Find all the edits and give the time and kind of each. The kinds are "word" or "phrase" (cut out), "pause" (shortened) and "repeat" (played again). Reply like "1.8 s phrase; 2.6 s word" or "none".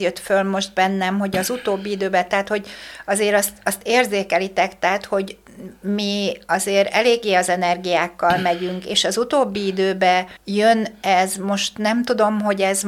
10.4 s pause